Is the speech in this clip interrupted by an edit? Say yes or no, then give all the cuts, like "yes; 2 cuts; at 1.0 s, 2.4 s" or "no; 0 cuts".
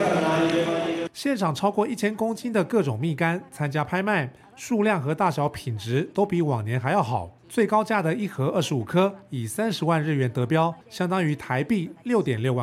yes; 1 cut; at 10.8 s